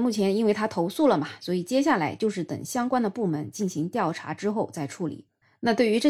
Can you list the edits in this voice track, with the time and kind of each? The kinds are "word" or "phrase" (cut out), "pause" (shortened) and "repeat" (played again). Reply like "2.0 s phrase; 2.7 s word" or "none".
none